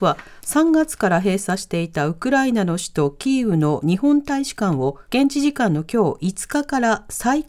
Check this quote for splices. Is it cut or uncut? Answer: cut